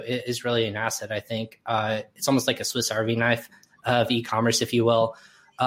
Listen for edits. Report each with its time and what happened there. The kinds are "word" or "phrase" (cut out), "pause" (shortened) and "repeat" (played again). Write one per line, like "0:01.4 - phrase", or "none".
none